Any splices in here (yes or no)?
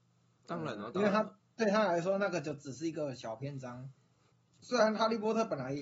no